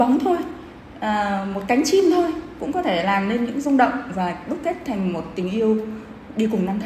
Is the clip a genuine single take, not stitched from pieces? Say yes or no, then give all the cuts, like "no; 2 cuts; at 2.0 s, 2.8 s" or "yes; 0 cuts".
yes; 0 cuts